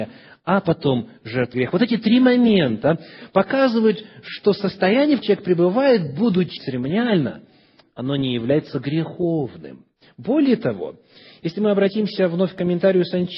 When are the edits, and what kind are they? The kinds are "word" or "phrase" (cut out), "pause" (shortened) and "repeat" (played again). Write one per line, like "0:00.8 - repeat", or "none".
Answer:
0:01.5 - word
0:05.2 - word
0:06.6 - word